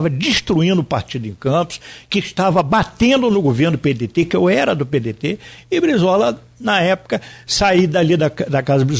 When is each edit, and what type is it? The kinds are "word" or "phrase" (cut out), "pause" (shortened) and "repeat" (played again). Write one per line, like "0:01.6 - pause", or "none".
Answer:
none